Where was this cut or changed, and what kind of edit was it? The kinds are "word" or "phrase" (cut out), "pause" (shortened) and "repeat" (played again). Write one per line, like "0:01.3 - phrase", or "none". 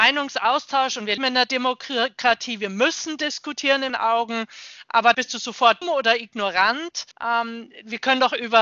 0:01.2 - word
0:03.9 - word
0:05.1 - word
0:05.8 - word
0:07.1 - pause